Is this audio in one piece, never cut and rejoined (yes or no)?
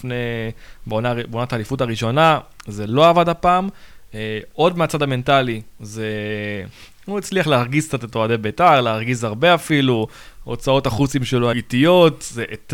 no